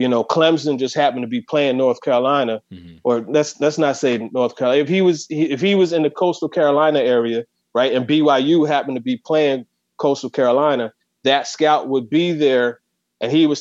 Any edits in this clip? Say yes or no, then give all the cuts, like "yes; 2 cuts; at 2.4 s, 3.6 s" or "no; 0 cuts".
no; 0 cuts